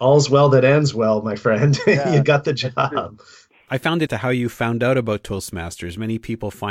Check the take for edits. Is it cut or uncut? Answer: cut